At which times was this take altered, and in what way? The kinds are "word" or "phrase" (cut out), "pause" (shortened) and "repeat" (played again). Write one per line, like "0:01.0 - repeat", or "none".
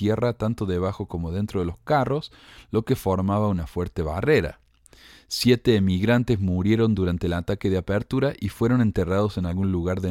none

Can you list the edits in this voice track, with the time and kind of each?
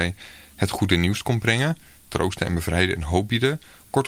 none

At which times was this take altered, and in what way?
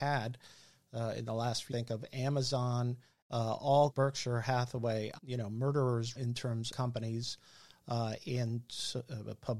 0:01.7 - word
0:03.2 - word
0:03.9 - word
0:05.2 - word
0:06.2 - word
0:06.7 - word

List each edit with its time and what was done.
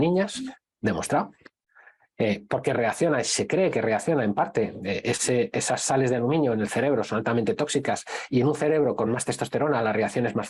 none

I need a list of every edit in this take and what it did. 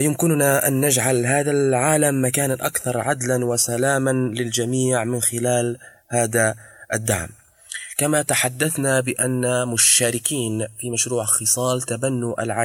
none

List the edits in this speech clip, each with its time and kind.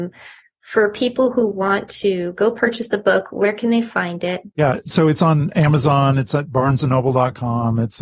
0:04.5 - pause

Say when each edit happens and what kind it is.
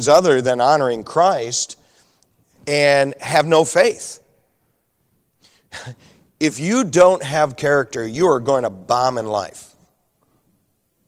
none

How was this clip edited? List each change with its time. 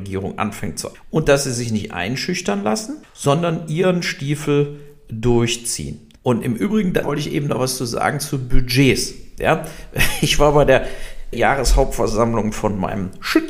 0:00.9 - word
0:03.0 - pause
0:06.2 - pause
0:07.0 - word
0:11.3 - word

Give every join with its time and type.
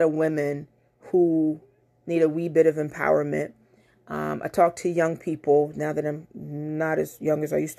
none

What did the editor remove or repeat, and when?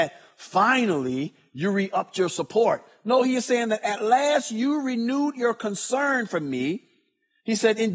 none

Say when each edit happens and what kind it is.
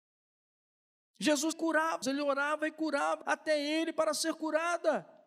0:01.5 - word
0:02.0 - word
0:03.2 - phrase

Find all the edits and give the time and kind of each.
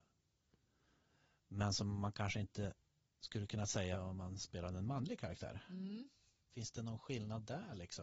none

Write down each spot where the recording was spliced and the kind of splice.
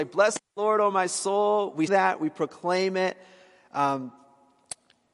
0:01.9 - word

